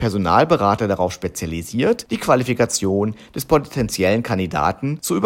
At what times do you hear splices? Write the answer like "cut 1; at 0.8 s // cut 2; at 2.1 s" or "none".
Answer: none